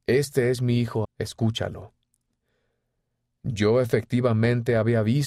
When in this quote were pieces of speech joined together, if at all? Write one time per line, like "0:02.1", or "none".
0:01.0